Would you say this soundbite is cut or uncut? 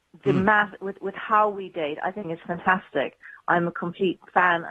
cut